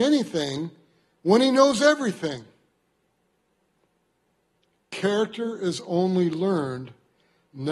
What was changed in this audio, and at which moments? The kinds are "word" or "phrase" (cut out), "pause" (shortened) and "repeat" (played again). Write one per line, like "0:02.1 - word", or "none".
none